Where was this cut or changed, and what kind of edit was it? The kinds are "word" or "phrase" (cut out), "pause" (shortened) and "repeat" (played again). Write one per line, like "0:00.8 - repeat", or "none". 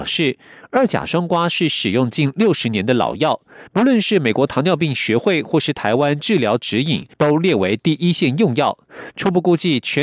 0:03.7 - pause
0:07.1 - pause